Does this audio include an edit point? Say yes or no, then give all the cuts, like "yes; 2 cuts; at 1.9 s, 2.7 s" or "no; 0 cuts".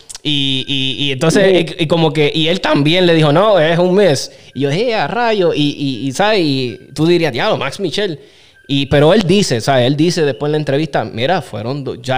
no; 0 cuts